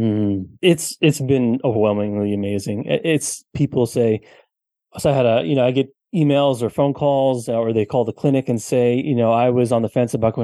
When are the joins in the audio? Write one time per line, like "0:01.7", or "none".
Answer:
none